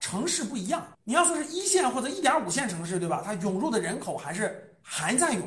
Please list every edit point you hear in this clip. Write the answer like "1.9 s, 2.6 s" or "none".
0.9 s